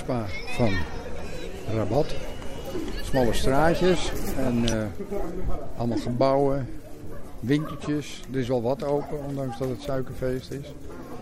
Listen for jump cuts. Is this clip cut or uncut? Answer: uncut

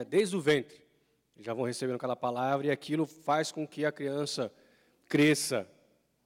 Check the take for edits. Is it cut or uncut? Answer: uncut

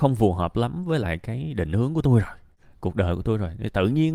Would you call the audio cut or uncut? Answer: uncut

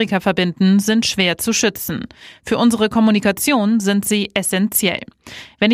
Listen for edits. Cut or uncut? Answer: uncut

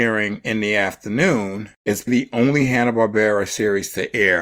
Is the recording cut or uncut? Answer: cut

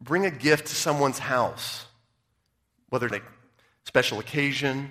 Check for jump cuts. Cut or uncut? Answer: cut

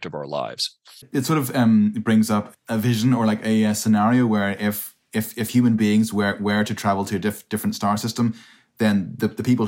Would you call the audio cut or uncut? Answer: uncut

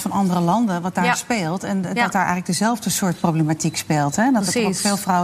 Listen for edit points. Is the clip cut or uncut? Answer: uncut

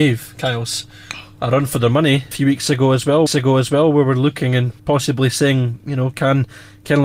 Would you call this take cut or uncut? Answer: cut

